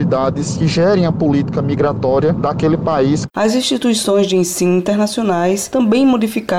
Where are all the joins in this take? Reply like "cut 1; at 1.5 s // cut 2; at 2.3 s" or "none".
none